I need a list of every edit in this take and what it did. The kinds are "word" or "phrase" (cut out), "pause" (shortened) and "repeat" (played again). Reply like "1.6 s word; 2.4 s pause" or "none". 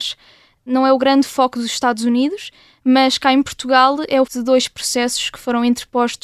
4.3 s word